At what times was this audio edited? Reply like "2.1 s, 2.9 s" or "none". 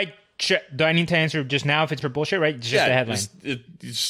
2.0 s